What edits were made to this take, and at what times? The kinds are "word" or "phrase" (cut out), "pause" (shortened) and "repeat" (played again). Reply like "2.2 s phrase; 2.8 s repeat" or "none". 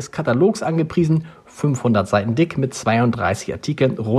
none